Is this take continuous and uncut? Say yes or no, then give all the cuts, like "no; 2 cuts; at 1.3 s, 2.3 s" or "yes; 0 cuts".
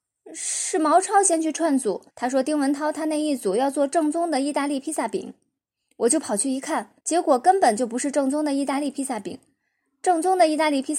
no; 2 cuts; at 2.1 s, 7.0 s